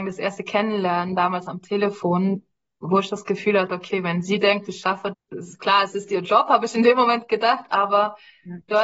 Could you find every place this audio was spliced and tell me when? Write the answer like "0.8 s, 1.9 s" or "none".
5.1 s